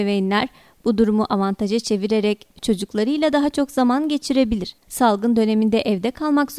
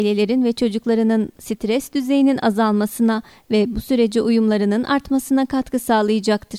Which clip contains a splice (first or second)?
first